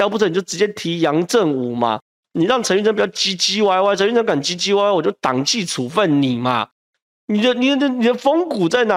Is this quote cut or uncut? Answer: uncut